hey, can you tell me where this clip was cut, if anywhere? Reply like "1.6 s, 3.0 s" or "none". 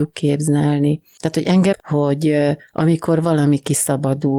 1.7 s